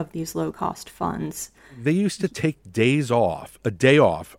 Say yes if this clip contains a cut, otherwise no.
no